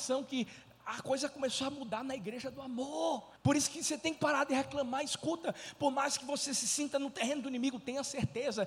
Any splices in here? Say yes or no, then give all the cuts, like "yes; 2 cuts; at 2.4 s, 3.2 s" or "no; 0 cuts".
yes; 1 cut; at 3.4 s